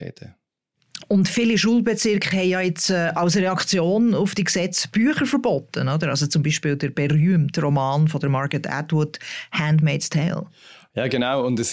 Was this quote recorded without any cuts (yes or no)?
yes